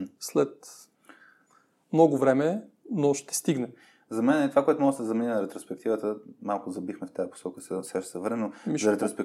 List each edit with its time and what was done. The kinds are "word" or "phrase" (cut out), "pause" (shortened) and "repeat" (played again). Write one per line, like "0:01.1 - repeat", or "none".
none